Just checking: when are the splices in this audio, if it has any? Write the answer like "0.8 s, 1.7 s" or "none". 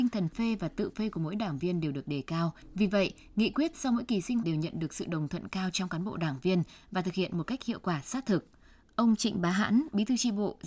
4.4 s